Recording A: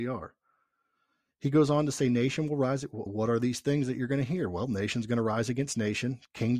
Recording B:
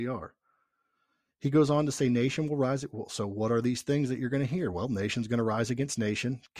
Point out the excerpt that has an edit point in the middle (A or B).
A